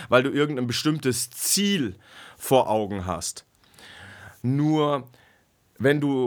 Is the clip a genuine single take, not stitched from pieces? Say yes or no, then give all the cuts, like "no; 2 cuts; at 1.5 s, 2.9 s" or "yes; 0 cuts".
yes; 0 cuts